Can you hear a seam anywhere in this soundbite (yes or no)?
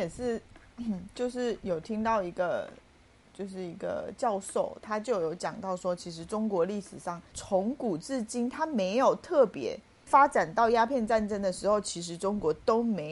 no